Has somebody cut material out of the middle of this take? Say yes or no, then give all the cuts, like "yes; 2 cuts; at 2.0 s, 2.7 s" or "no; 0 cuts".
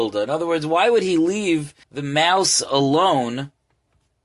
yes; 1 cut; at 1.8 s